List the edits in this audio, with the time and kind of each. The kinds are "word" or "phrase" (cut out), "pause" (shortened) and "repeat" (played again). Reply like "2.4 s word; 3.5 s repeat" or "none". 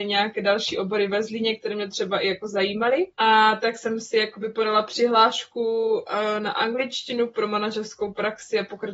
3.1 s pause